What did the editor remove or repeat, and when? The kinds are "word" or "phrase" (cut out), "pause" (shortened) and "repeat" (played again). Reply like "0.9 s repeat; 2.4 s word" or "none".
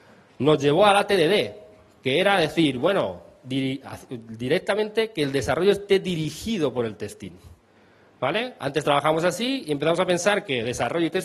none